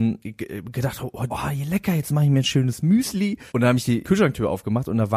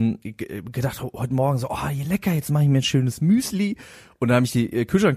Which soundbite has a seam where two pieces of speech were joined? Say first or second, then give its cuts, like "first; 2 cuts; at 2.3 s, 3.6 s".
first; 3 cuts; at 1.3 s, 3.5 s, 4.0 s